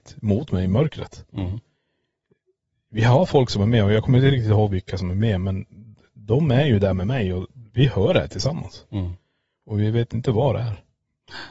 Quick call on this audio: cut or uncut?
uncut